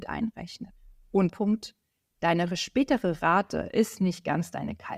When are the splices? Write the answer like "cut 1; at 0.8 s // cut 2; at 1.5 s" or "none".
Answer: cut 1; at 1.3 s